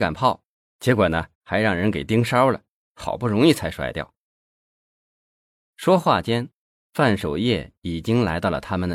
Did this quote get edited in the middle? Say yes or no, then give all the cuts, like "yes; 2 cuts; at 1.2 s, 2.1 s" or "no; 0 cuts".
yes; 1 cut; at 1.3 s